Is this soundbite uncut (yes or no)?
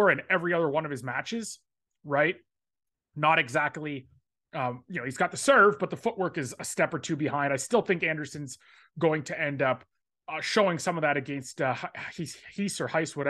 yes